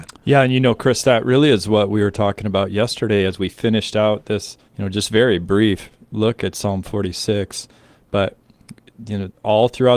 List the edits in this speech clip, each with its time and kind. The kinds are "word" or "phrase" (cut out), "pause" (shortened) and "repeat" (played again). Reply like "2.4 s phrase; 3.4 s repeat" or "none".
4.7 s pause